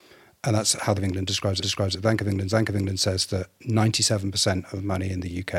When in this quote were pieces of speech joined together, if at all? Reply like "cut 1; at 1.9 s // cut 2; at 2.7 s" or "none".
cut 1; at 1.0 s // cut 2; at 1.6 s // cut 3; at 2.5 s

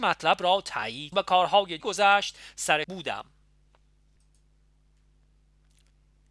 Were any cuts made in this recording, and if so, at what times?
cut 1; at 1.1 s // cut 2; at 1.8 s // cut 3; at 2.8 s

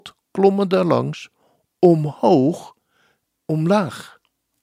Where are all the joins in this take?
cut 1; at 3.3 s

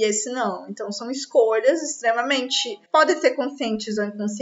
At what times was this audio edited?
cut 1; at 2.9 s

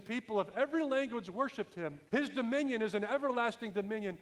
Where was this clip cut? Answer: cut 1; at 2.1 s

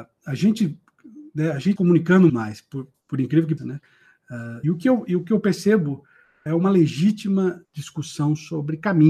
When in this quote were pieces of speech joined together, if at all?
cut 1; at 1.8 s // cut 2; at 2.3 s // cut 3; at 2.9 s // cut 4; at 3.6 s // cut 5; at 4.6 s // cut 6; at 6.5 s // cut 7; at 7.6 s

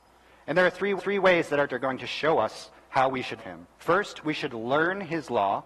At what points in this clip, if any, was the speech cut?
cut 1; at 1.0 s // cut 2; at 1.7 s // cut 3; at 3.4 s // cut 4; at 3.7 s

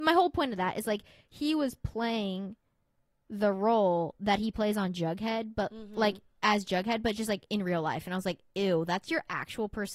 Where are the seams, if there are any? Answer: none

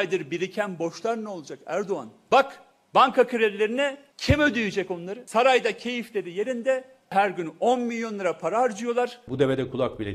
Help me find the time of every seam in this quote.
none

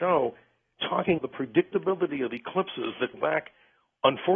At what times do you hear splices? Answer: cut 1; at 1.2 s // cut 2; at 3.1 s

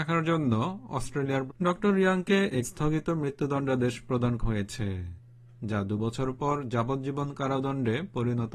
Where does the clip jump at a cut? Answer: cut 1; at 1.5 s // cut 2; at 2.6 s // cut 3; at 4.4 s

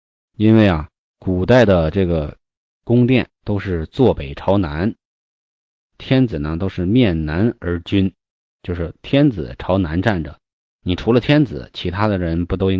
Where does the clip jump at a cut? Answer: none

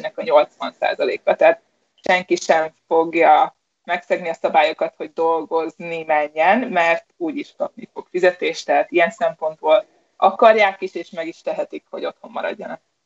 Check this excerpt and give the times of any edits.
none

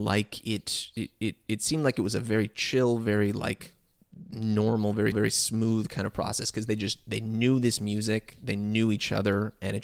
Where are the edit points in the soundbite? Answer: cut 1; at 5.1 s

